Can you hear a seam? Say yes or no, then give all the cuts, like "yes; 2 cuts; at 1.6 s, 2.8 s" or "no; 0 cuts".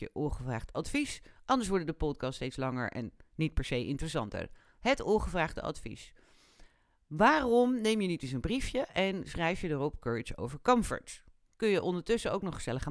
no; 0 cuts